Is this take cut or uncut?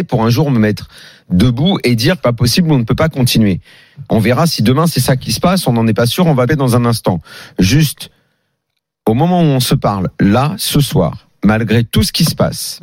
cut